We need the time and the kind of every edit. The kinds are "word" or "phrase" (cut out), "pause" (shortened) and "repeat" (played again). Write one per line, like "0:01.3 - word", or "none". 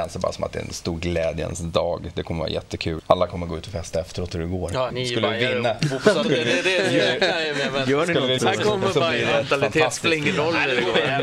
0:03.0 - word
0:04.3 - word
0:04.9 - word
0:06.2 - word
0:08.4 - word